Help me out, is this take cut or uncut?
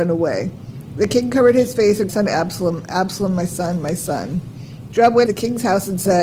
cut